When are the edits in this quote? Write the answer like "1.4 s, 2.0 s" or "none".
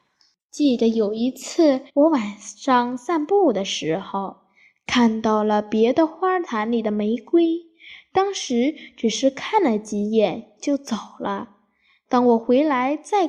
1.9 s